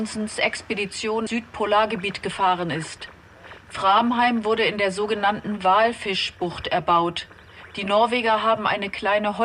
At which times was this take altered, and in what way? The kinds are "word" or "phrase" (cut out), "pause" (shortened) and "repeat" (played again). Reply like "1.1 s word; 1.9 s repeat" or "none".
1.3 s word

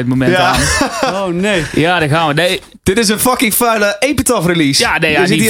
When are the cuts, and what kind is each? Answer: none

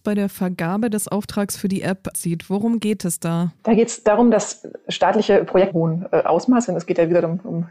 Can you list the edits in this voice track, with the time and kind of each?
2.1 s word; 3.6 s pause; 5.7 s phrase

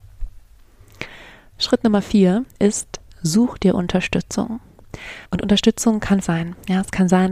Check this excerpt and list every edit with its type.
5.2 s pause; 6.2 s word

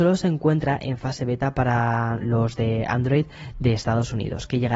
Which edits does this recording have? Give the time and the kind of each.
none

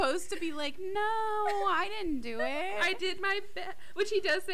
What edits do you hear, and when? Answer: none

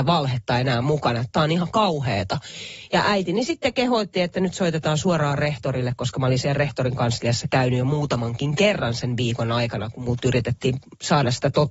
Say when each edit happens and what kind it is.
none

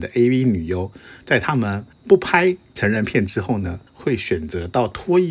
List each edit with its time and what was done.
1.9 s pause; 3.9 s pause

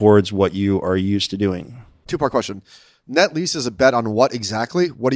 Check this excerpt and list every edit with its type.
none

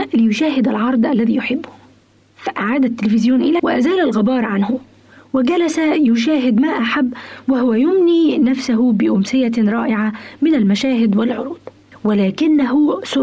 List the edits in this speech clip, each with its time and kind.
3.6 s word

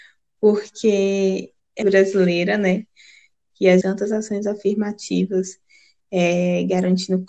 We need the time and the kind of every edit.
1.8 s phrase; 3.8 s phrase

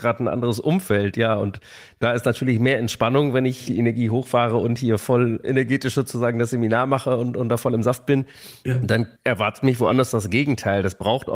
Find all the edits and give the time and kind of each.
9.2 s pause

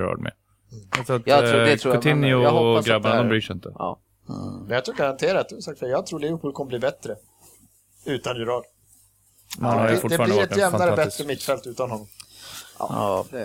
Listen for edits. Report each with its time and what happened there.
none

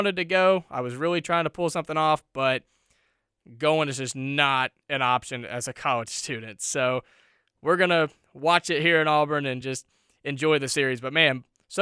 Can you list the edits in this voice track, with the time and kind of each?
none

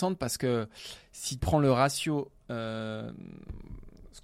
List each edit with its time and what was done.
1.4 s word

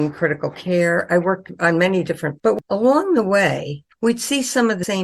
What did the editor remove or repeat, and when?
2.4 s word

